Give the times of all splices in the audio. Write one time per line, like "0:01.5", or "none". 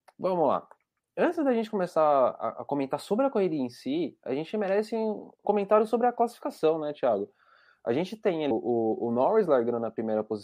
0:05.4
0:08.5